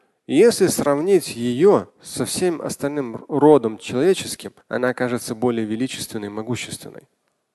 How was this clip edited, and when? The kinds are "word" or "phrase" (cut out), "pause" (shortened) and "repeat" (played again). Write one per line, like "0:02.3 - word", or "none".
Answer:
0:01.9 - pause
0:04.6 - pause